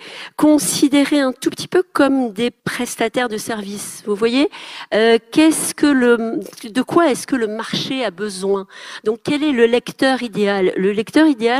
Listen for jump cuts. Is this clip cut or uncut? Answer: cut